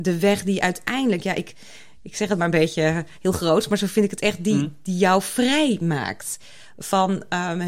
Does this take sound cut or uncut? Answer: uncut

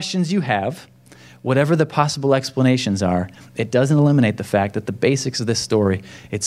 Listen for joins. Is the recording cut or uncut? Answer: uncut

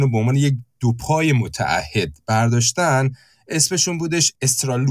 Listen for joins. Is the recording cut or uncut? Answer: uncut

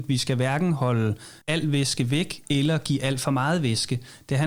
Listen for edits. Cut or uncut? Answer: cut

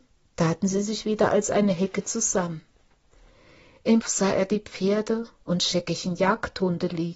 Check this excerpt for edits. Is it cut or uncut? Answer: cut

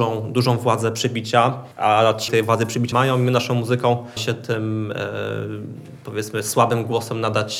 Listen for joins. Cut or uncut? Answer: cut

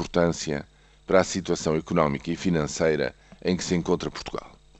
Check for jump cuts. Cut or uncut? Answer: uncut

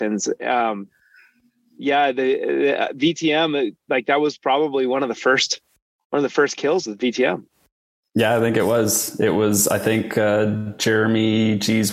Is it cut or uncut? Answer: uncut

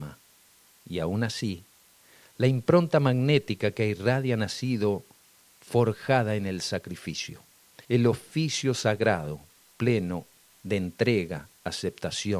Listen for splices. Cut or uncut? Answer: cut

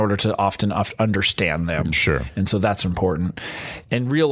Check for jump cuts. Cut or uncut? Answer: uncut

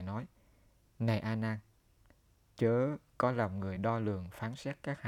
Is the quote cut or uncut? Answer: uncut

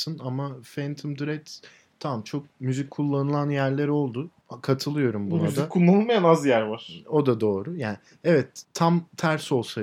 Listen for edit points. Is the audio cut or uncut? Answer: uncut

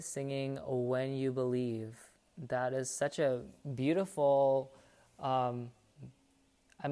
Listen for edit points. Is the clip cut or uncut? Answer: uncut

